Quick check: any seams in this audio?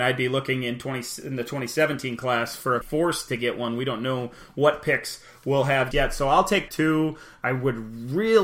yes; 3 cuts; at 2.8 s, 5.9 s, 6.7 s

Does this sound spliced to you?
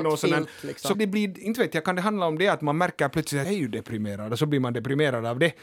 yes; 2 cuts; at 0.9 s, 3.4 s

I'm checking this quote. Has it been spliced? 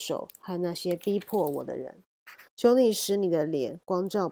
yes; 1 cut; at 2.5 s

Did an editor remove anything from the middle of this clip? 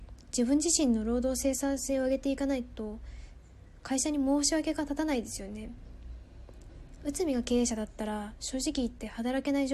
no; 0 cuts

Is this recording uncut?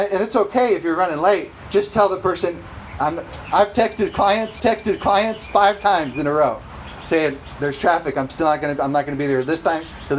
no; 1 cut; at 4.6 s

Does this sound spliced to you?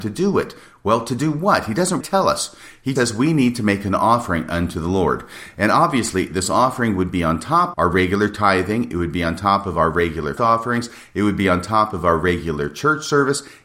yes; 4 cuts; at 2.0 s, 3.0 s, 7.7 s, 10.4 s

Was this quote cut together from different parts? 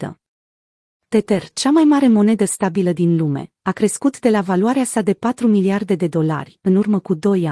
no; 0 cuts

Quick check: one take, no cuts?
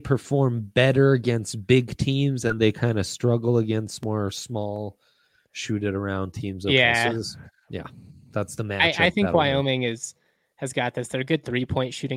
yes; 0 cuts

